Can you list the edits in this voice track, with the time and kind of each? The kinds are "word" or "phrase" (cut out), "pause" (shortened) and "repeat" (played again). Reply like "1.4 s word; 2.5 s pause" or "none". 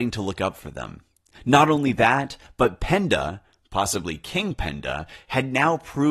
none